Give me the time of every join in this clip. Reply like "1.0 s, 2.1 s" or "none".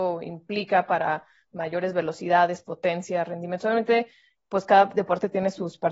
none